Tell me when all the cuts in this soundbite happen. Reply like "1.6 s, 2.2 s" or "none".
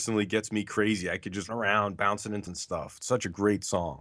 1.5 s, 2.5 s